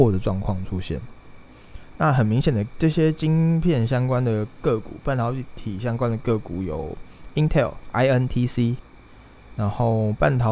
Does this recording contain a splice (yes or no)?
no